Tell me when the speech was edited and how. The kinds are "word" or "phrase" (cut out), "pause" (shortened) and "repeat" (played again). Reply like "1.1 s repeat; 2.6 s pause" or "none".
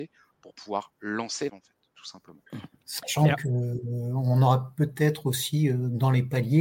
1.5 s word; 2.5 s pause